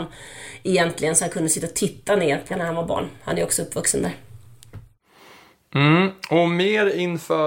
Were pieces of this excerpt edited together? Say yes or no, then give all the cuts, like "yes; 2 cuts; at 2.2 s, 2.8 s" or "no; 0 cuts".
yes; 1 cut; at 2.5 s